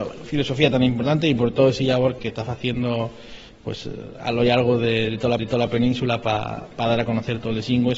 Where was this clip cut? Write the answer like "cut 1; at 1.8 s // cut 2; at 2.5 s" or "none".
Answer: cut 1; at 2.2 s // cut 2; at 5.4 s